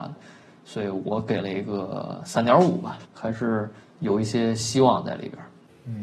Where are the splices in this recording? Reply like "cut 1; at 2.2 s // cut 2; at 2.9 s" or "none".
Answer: cut 1; at 3.0 s // cut 2; at 3.8 s